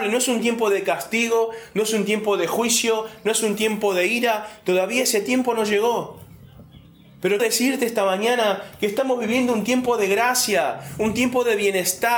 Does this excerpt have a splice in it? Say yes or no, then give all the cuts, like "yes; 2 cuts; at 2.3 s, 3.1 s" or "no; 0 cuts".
yes; 1 cut; at 7.4 s